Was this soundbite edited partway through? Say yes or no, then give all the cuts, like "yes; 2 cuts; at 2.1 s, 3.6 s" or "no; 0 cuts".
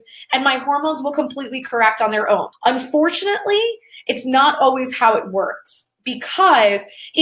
yes; 1 cut; at 2.5 s